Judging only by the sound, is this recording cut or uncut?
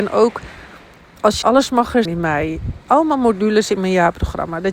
cut